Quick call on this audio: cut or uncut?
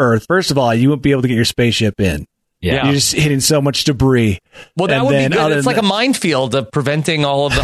uncut